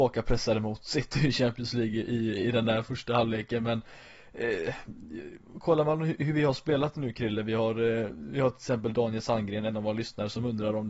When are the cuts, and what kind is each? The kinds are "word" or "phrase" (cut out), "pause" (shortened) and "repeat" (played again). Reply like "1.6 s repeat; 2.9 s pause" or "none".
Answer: none